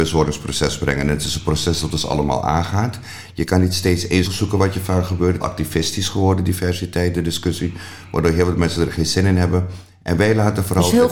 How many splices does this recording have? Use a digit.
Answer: 2